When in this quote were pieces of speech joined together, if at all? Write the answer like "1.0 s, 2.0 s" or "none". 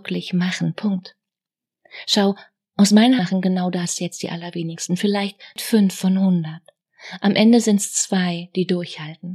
3.2 s